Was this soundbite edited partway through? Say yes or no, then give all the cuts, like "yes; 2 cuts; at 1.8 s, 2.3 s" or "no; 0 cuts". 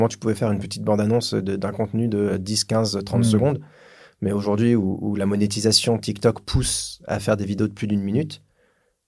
no; 0 cuts